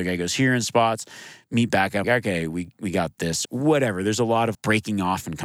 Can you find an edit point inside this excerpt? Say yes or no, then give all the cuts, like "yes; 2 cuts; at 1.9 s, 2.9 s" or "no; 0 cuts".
yes; 3 cuts; at 2.0 s, 3.5 s, 4.5 s